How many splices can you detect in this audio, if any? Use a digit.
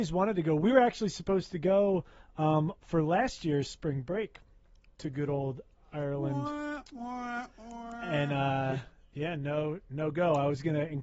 0